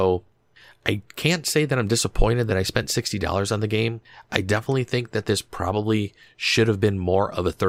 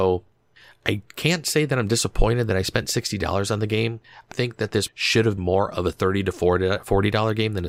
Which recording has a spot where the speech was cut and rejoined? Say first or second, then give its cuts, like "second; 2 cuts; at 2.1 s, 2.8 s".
second; 3 cuts; at 4.3 s, 4.9 s, 5.4 s